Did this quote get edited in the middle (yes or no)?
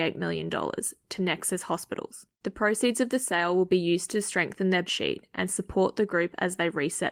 yes